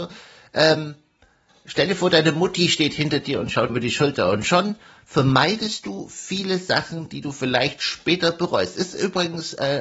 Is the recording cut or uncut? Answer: cut